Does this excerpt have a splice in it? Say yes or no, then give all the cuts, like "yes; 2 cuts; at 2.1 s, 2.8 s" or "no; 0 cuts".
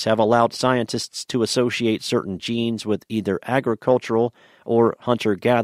no; 0 cuts